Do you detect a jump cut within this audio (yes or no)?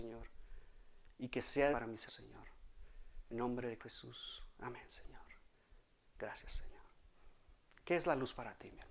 yes